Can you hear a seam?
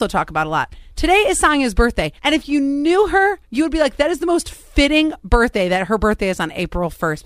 yes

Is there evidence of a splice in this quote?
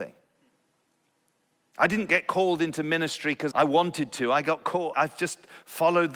yes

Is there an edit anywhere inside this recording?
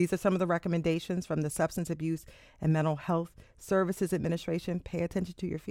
no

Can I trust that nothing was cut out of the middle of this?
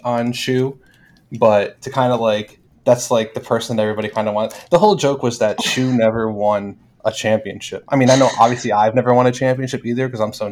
yes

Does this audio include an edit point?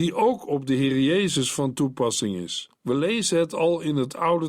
yes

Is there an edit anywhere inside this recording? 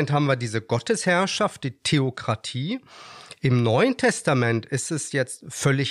no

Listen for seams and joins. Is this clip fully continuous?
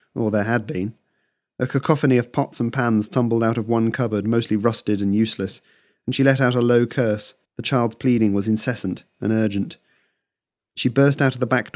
no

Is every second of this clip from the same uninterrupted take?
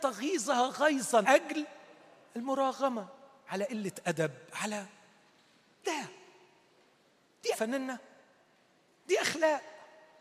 no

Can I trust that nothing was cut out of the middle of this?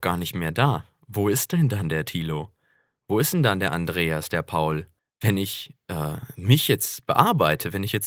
no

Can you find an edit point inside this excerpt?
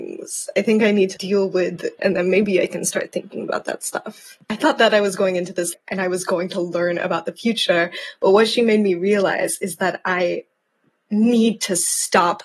yes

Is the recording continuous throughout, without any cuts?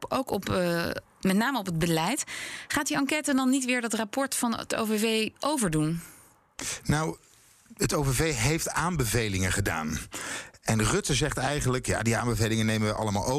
yes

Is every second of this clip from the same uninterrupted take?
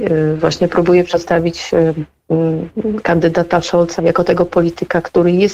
no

